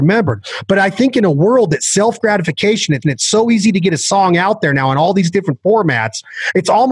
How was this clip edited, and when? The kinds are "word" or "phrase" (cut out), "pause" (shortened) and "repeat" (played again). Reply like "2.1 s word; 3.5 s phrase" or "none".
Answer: 3.0 s repeat